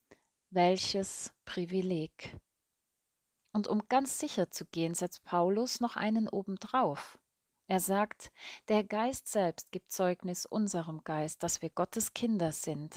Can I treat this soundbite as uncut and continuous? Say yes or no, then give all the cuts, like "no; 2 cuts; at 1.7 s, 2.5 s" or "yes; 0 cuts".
yes; 0 cuts